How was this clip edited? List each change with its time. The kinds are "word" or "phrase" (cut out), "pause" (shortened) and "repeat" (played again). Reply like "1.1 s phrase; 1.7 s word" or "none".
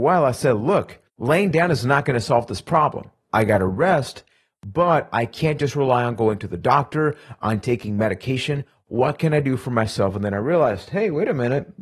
1.1 s pause